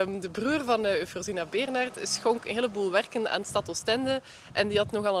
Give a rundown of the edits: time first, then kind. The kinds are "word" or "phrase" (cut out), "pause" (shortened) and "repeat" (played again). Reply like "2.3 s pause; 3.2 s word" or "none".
none